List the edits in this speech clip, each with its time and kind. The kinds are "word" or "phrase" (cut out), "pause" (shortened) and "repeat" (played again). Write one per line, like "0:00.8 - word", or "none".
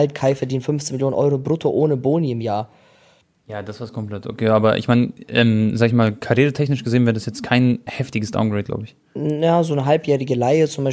none